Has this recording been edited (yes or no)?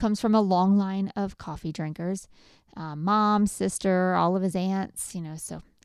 no